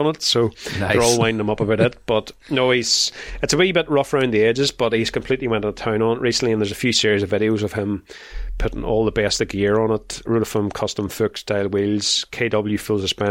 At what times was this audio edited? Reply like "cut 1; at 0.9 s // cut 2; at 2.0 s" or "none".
cut 1; at 10.3 s

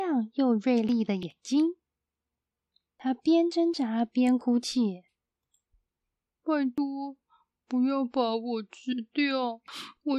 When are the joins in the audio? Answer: none

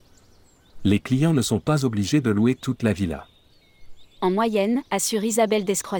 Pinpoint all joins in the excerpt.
cut 1; at 4.8 s

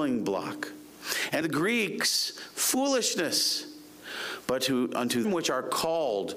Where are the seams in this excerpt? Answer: cut 1; at 1.4 s // cut 2; at 5.2 s

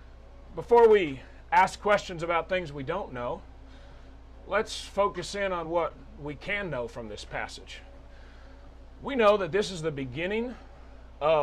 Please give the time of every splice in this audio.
none

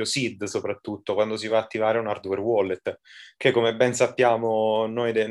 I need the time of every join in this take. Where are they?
none

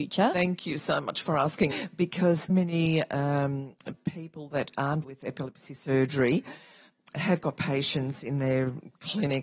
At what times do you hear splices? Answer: cut 1; at 1.7 s // cut 2; at 2.5 s // cut 3; at 5.0 s

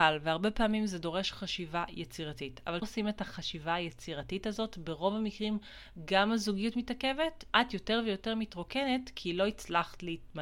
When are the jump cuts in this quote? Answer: cut 1; at 2.8 s // cut 2; at 7.5 s

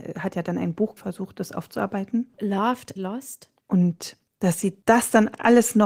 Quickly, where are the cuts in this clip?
cut 1; at 1.0 s // cut 2; at 3.0 s

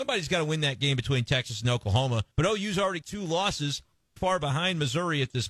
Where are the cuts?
cut 1; at 2.3 s // cut 2; at 3.0 s // cut 3; at 4.2 s

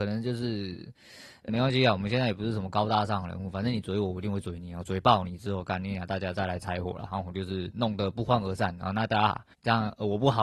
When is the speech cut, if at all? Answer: cut 1; at 1.5 s // cut 2; at 9.5 s

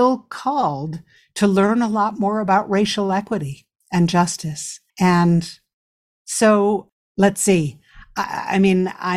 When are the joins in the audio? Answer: cut 1; at 4.9 s

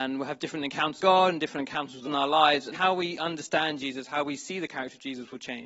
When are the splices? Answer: cut 1; at 1.0 s // cut 2; at 2.0 s // cut 3; at 2.7 s

